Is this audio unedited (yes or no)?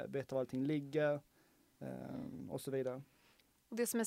yes